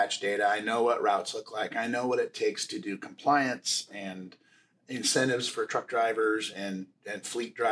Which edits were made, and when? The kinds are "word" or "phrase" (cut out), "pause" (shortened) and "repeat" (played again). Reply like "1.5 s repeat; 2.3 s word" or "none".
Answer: none